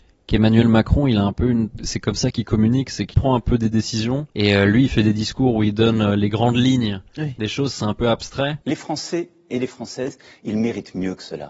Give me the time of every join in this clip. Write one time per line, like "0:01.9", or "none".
0:03.1
0:04.3
0:08.6